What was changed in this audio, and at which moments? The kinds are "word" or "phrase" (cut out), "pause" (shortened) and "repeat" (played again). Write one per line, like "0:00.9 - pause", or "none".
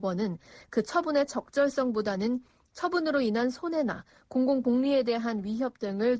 none